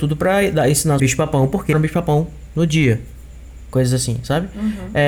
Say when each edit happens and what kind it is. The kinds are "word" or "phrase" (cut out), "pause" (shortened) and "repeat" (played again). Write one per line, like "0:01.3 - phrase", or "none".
0:01.0 - phrase
0:01.7 - word